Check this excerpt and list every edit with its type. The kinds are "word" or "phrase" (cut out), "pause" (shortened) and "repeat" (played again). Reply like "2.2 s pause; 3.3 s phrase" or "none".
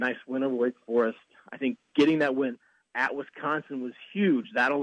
none